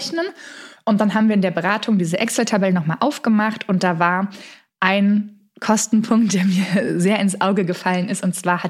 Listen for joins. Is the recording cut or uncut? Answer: uncut